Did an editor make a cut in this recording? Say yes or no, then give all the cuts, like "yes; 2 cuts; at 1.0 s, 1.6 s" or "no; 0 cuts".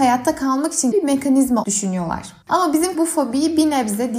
yes; 4 cuts; at 0.9 s, 1.6 s, 2.4 s, 2.9 s